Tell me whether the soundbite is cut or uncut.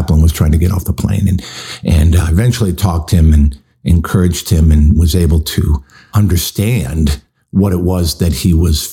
uncut